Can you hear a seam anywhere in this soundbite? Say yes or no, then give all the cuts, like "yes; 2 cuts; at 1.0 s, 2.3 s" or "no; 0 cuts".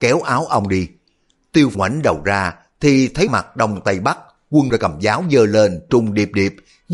yes; 4 cuts; at 1.7 s, 3.3 s, 4.7 s, 5.9 s